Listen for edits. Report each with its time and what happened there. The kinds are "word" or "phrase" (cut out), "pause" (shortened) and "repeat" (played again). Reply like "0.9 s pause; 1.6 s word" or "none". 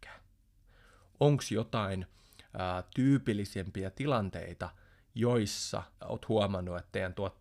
5.9 s pause